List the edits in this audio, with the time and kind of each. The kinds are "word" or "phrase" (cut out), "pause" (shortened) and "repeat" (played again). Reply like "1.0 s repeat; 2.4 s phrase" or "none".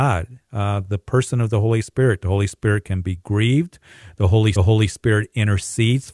4.6 s repeat